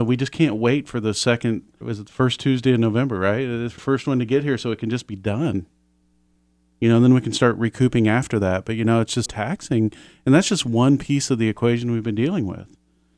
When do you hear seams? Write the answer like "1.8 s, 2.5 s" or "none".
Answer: 1.8 s, 3.8 s, 9.3 s